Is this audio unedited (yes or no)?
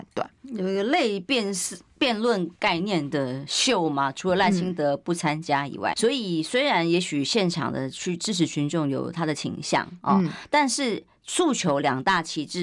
no